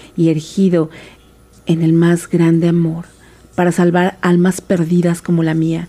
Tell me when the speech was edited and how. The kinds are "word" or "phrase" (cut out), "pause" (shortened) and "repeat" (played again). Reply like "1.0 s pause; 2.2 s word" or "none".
none